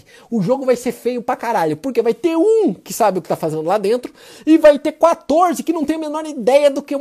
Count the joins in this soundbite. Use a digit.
0